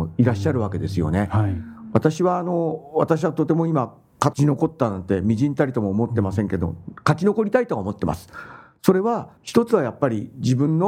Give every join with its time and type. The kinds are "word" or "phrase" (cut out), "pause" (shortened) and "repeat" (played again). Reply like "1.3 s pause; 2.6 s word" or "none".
9.4 s pause